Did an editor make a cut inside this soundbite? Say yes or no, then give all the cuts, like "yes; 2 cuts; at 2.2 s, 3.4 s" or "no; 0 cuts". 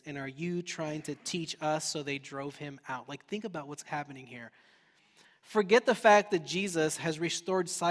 no; 0 cuts